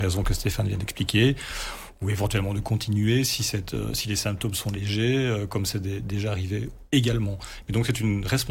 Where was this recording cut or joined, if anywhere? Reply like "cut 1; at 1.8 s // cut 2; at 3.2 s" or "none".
none